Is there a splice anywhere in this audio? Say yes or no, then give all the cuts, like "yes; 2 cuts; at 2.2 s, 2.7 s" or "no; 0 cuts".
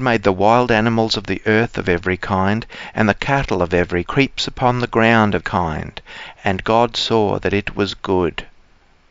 yes; 2 cuts; at 4.1 s, 5.4 s